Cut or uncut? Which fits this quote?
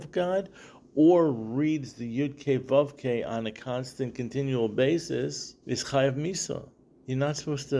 cut